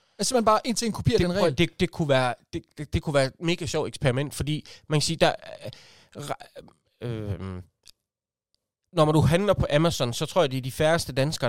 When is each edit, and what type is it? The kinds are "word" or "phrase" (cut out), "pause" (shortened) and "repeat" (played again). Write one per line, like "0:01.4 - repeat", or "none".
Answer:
none